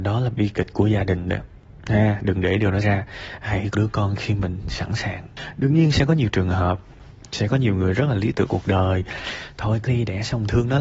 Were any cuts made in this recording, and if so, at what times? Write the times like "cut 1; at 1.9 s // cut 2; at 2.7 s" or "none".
cut 1; at 2.8 s // cut 2; at 3.7 s // cut 3; at 8.5 s // cut 4; at 9.9 s